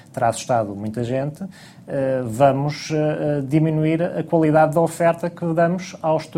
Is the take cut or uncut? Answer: uncut